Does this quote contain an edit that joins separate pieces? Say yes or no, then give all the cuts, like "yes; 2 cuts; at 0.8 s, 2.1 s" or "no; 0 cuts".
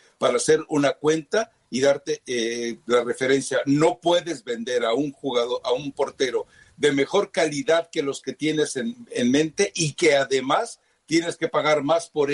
no; 0 cuts